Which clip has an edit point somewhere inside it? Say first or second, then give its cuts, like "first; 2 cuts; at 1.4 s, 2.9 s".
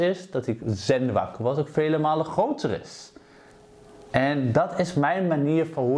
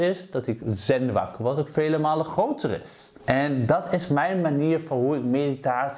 second; 1 cut; at 3.2 s